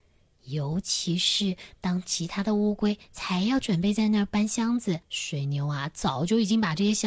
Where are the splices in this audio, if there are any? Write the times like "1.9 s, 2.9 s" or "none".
5.0 s